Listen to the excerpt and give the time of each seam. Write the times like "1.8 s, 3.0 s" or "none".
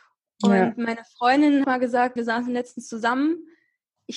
1.6 s, 2.2 s